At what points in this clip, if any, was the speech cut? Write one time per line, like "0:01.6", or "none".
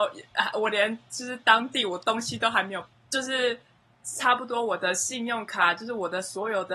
none